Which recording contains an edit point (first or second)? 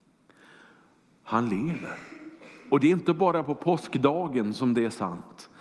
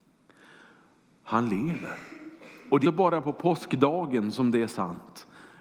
second